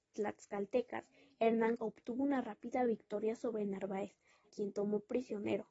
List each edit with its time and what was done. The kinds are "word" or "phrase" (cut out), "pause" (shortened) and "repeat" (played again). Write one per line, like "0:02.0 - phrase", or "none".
0:01.8 - word
0:04.4 - word